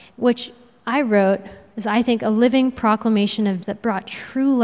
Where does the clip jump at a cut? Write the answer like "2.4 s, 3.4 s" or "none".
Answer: 3.6 s